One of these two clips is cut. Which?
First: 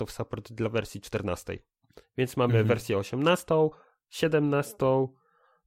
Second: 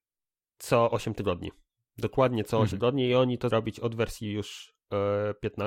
second; 2 cuts; at 2.7 s, 3.5 s

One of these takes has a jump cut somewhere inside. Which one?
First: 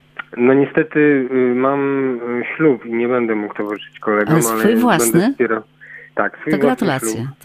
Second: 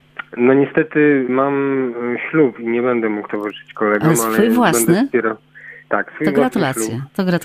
second; 1 cut; at 1.3 s

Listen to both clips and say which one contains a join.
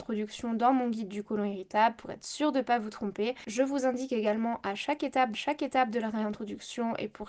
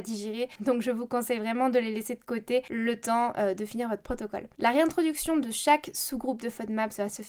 first; 1 cut; at 5.3 s

